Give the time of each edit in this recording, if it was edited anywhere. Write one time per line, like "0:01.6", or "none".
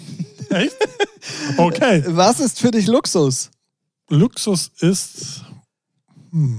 0:03.7